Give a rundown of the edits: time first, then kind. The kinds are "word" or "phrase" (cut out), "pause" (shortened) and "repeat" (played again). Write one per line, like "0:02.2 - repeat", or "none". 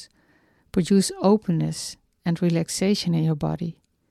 none